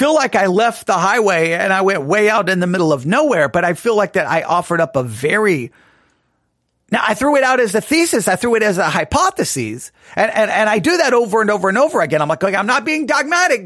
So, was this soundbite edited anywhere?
no; 0 cuts

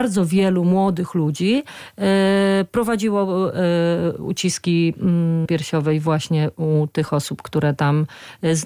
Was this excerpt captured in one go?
no; 1 cut; at 5.5 s

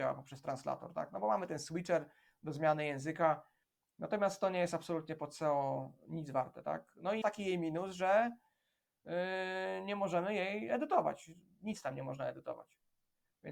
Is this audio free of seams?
no; 1 cut; at 7.2 s

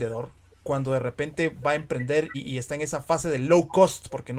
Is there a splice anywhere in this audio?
yes; 1 cut; at 2.3 s

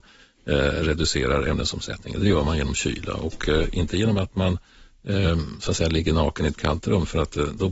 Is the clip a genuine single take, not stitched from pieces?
yes; 0 cuts

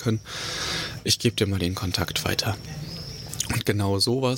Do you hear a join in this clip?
no; 0 cuts

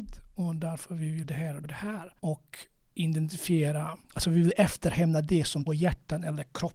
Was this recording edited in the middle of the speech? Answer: yes; 5 cuts; at 1.2 s, 1.6 s, 2.2 s, 4.0 s, 5.7 s

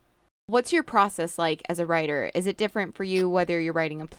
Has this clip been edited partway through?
no; 0 cuts

